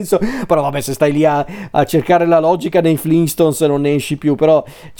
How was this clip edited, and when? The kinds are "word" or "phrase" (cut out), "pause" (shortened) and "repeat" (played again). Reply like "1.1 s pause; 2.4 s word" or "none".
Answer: none